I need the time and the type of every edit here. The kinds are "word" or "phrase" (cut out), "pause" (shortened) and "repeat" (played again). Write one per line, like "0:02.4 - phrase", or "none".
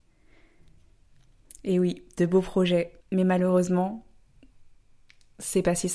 0:03.0 - pause